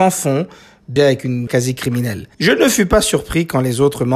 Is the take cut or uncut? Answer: cut